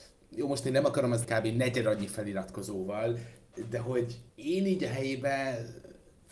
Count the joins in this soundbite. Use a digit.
2